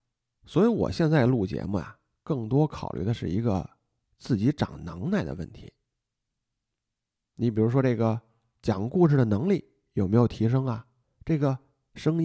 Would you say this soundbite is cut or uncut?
uncut